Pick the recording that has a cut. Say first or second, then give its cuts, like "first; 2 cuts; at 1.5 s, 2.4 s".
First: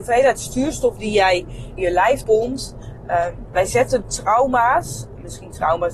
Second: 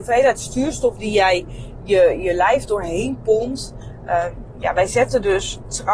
first; 4 cuts; at 1.8 s, 2.2 s, 3.5 s, 4.0 s